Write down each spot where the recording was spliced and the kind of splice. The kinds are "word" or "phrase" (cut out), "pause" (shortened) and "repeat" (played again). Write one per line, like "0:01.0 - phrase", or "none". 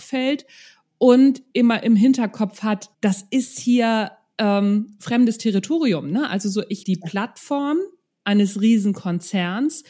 0:01.5 - word
0:02.9 - pause
0:06.8 - phrase